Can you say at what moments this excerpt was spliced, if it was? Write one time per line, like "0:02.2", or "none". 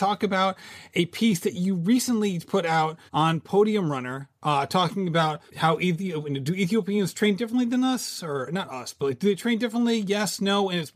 0:03.1
0:05.5